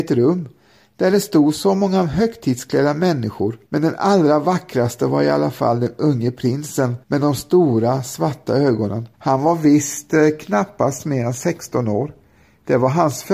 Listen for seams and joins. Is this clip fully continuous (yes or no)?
no